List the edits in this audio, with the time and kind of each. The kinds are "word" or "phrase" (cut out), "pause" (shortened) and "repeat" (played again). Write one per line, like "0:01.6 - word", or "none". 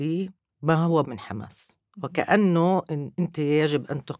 0:01.0 - word

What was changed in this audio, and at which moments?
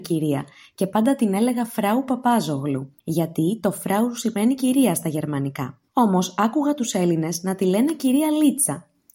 0:03.0 - pause
0:05.9 - pause

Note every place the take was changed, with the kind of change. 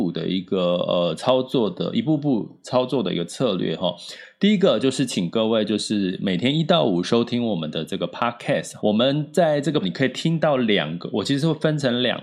0:08.8 - word
0:09.8 - phrase

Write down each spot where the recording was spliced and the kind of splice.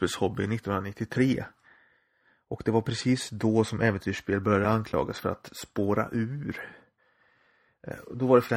none

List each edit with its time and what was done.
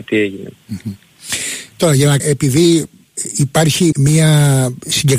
0:02.2 - word
0:03.9 - word

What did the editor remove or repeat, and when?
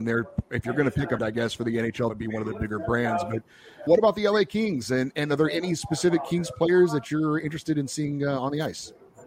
0:01.2 - word
0:02.1 - word
0:03.9 - word

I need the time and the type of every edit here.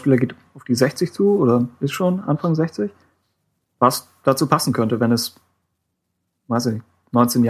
none

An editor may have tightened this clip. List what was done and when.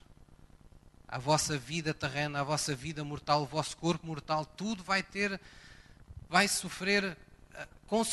none

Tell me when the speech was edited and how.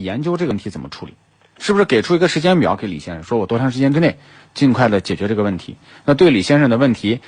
none

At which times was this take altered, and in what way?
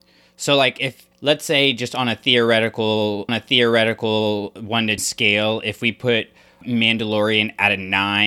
0:01.1 - pause
0:03.3 - repeat
0:05.0 - word
0:06.6 - word

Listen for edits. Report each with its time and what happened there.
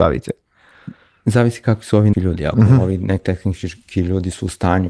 0:02.1 - word

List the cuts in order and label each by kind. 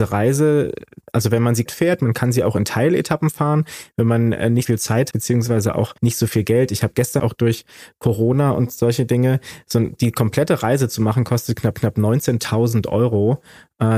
0:01.7 - word
0:04.6 - word
0:05.1 - word
0:06.0 - pause
0:07.2 - phrase
0:11.7 - repeat

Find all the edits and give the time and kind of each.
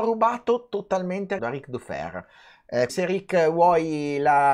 0:01.4 - word
0:02.9 - word

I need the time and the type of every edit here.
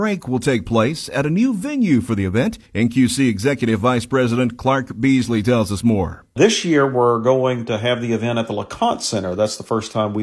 0:02.7 - pause

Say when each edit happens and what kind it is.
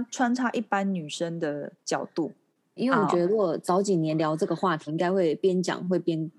0:01.8 - pause
0:02.8 - word
0:04.9 - word

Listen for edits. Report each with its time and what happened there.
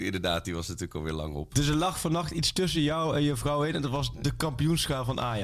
none

